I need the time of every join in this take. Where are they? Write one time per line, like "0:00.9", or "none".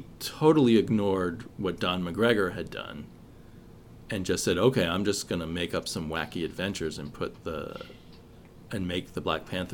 none

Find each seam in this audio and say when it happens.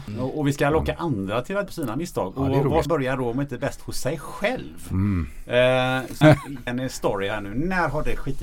0:01.7
0:02.8
0:06.2
0:06.7

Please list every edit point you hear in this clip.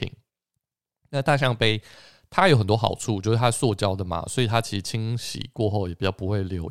none

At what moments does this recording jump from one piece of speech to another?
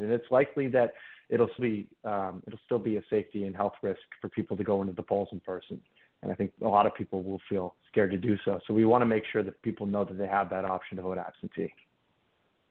0:01.6
0:07.8
0:09.6

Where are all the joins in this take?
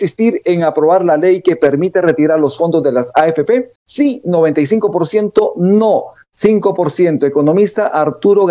0:03.8

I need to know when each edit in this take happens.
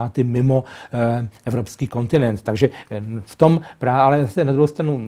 none

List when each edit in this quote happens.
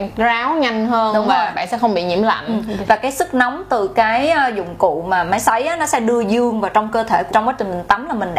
0:07.3

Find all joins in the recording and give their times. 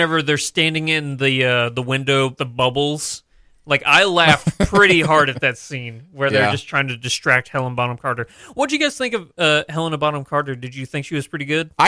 0:02.4

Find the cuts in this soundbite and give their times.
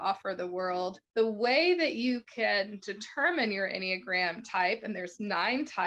0:01.0

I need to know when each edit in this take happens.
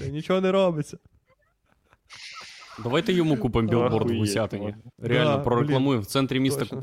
0:04.9

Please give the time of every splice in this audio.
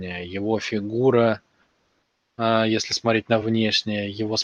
none

